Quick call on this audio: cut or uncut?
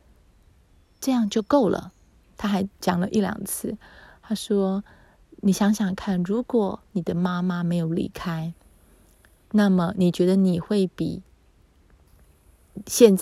cut